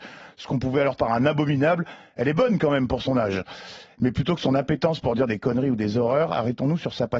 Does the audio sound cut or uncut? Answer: cut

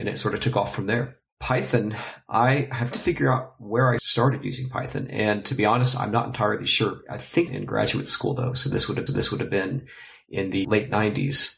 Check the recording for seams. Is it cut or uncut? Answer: cut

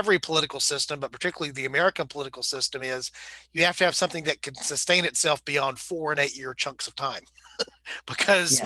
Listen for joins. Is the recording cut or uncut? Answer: uncut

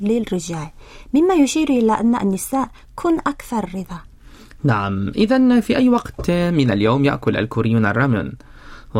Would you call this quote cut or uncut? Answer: uncut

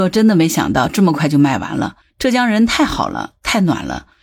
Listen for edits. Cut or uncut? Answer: cut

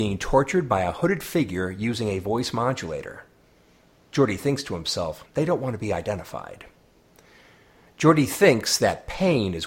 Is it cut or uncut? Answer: cut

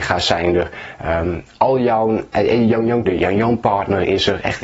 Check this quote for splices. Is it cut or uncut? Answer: cut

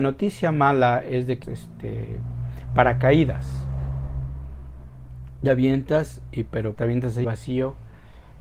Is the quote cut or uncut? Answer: cut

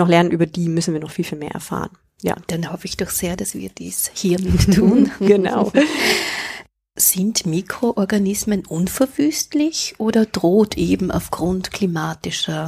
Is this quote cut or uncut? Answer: uncut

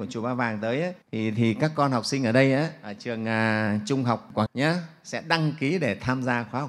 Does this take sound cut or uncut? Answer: cut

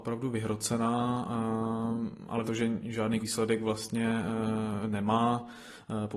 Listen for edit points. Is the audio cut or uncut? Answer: cut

